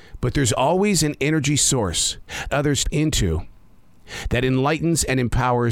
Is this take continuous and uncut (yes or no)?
no